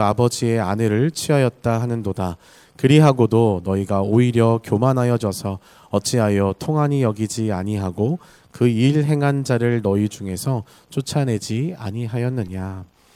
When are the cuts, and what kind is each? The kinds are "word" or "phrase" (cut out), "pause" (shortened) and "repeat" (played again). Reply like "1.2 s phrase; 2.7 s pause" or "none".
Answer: none